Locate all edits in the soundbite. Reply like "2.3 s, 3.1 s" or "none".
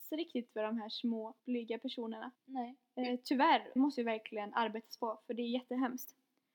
1.4 s, 2.3 s, 3.8 s